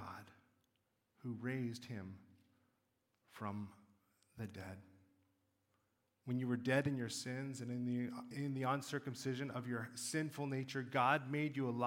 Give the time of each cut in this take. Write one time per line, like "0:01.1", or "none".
0:08.3

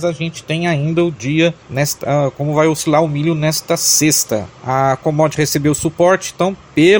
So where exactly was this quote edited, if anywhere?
none

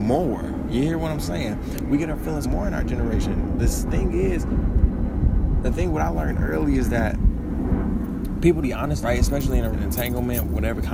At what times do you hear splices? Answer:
0:02.4
0:03.9
0:08.6
0:09.0
0:09.7

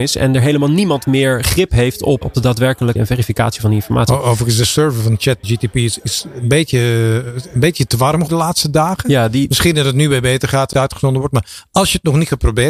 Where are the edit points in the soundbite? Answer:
0:02.2
0:03.0
0:05.4
0:08.3
0:10.7

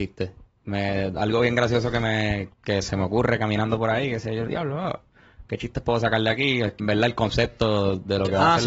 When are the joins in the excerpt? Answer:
0:02.5
0:04.5
0:06.8

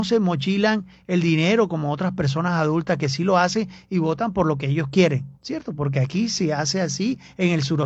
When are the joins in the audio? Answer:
0:05.4

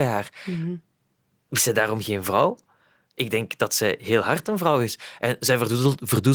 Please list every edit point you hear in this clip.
none

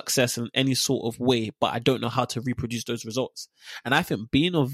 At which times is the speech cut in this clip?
none

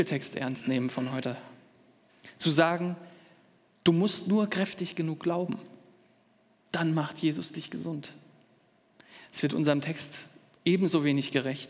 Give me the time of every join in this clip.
none

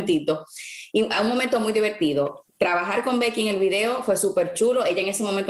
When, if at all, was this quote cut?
0:02.5

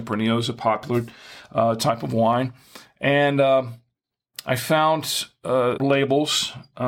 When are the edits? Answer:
0:05.8

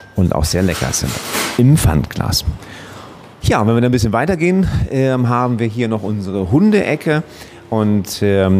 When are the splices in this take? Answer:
0:03.3

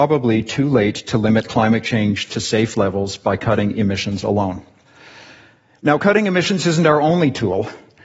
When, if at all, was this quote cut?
none

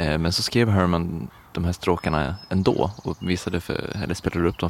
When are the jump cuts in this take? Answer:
none

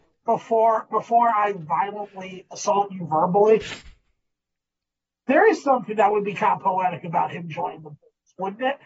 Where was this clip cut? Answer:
none

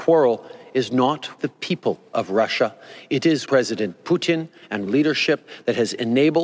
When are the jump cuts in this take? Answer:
0:01.4
0:03.5
0:04.9

